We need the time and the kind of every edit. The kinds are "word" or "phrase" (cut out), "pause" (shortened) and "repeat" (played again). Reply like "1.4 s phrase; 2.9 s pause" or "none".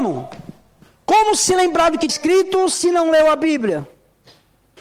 2.1 s word